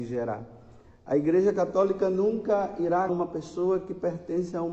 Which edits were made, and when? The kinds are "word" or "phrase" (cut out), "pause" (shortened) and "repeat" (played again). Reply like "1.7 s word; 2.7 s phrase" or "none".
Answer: 3.1 s word